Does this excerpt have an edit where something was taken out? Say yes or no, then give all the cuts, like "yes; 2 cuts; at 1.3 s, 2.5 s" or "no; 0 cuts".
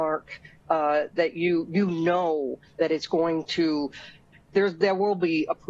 no; 0 cuts